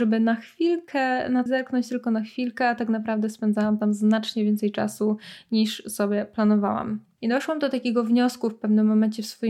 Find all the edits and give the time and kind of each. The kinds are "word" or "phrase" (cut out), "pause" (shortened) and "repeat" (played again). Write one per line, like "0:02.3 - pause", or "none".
0:01.5 - word